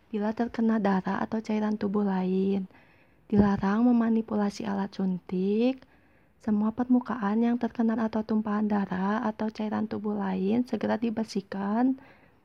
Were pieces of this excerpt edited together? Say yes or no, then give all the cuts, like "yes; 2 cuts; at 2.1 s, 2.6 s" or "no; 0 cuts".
yes; 1 cut; at 8.0 s